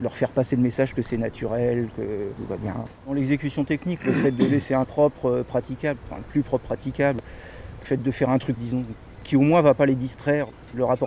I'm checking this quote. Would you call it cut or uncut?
cut